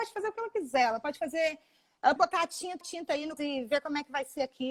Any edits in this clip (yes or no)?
yes